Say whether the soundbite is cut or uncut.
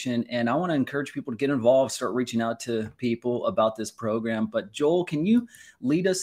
uncut